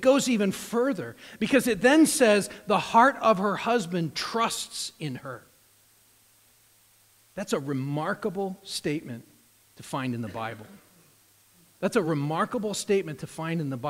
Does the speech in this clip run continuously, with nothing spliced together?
yes; 0 cuts

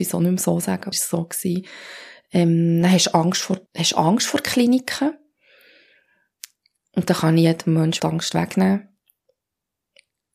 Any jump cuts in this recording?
yes; 3 cuts; at 0.9 s, 3.7 s, 8.0 s

